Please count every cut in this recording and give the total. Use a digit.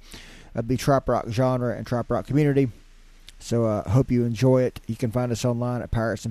0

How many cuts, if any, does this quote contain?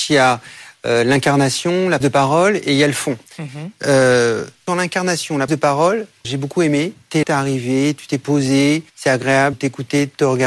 8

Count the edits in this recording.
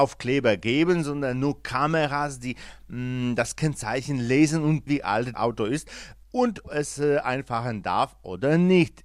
3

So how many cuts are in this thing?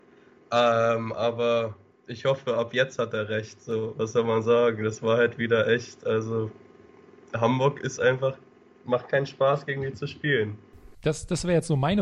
0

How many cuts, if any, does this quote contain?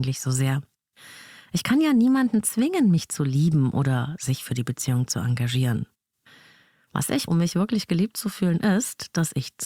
1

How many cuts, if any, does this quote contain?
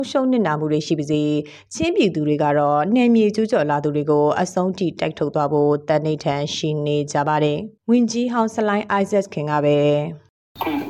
1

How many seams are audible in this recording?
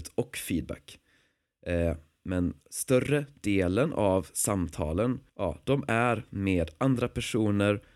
2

